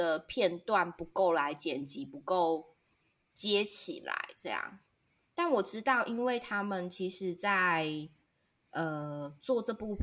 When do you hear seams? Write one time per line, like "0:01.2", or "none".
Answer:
none